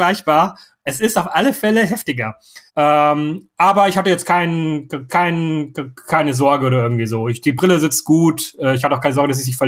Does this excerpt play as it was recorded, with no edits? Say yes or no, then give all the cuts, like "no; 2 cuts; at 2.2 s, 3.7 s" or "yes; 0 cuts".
no; 3 cuts; at 2.7 s, 5.1 s, 7.4 s